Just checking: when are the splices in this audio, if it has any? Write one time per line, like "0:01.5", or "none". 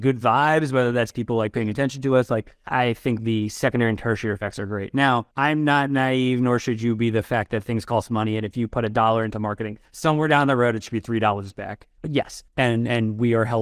0:05.3